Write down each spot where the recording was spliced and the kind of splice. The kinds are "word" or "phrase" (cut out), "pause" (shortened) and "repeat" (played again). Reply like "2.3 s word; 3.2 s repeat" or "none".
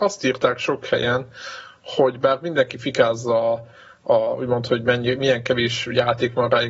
none